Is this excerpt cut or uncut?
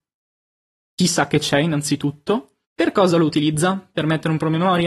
cut